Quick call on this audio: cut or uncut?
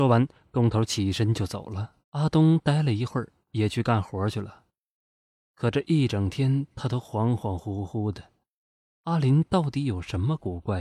cut